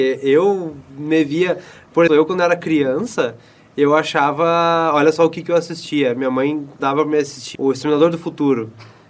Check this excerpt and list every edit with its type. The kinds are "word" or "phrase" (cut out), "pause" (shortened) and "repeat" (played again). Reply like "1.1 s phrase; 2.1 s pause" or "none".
2.1 s word; 6.8 s word; 7.5 s word